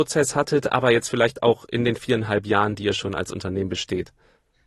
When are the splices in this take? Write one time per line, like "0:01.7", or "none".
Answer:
none